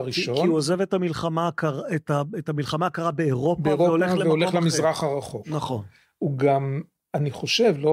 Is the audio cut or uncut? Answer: uncut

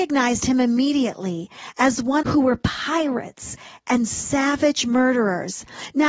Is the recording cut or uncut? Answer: cut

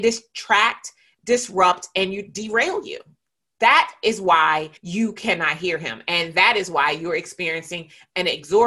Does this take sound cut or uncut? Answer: cut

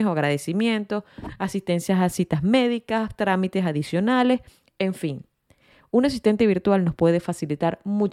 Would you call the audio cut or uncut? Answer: uncut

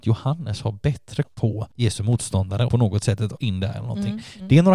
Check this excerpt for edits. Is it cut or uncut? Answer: cut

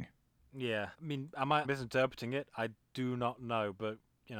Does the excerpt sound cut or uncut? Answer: cut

